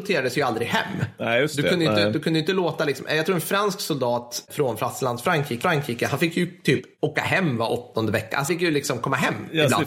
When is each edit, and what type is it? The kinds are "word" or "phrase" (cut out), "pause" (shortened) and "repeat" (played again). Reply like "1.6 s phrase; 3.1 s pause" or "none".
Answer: 5.6 s repeat; 8.5 s word